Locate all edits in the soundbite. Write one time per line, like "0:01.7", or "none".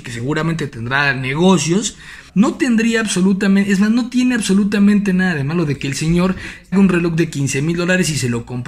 0:02.3
0:06.7